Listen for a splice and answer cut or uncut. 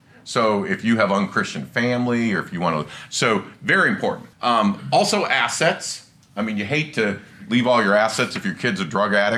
cut